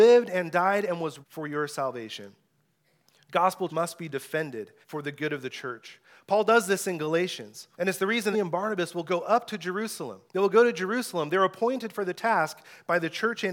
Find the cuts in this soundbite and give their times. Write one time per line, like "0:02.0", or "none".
0:01.2
0:03.7
0:04.8
0:07.7
0:08.3
0:10.3